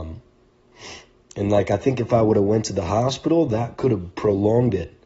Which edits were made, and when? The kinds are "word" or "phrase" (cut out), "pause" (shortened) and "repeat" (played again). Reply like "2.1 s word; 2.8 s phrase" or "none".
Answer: 1.1 s pause